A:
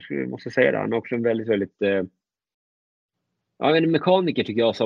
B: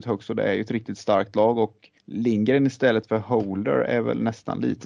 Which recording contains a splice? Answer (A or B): B